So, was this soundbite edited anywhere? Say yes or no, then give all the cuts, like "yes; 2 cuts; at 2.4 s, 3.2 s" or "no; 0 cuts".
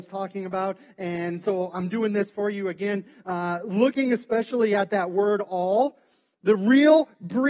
no; 0 cuts